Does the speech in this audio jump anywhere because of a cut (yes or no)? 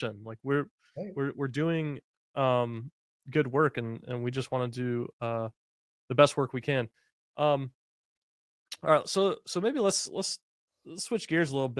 no